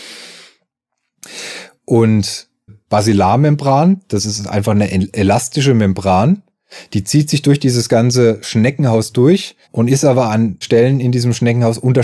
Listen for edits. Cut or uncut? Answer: cut